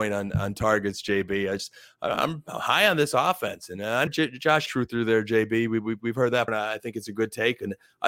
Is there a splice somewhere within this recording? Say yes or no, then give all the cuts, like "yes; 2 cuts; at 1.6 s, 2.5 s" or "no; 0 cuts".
yes; 3 cuts; at 4.1 s, 4.7 s, 6.5 s